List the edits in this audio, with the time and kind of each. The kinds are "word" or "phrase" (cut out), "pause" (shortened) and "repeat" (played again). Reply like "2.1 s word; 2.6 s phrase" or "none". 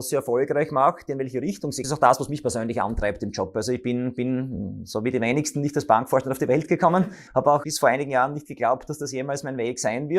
1.8 s phrase; 7.3 s pause; 7.6 s word